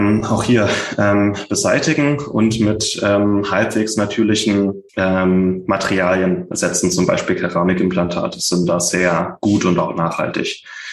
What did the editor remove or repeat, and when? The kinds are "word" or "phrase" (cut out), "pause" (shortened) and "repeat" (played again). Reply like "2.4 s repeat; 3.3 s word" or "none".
4.9 s pause